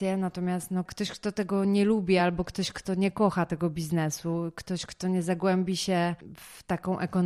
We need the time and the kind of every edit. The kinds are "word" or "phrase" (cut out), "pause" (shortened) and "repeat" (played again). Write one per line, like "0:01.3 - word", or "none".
none